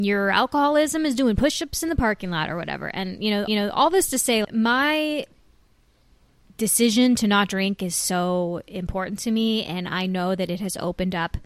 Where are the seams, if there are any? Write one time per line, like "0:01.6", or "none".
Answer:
0:03.5
0:04.4